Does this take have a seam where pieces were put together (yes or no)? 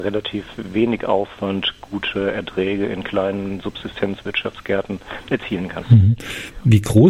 no